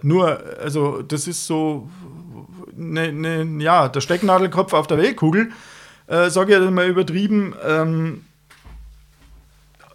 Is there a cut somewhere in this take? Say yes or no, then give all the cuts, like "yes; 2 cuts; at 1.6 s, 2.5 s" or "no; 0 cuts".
no; 0 cuts